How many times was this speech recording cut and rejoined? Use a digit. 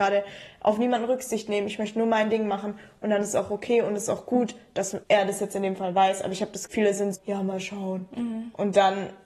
3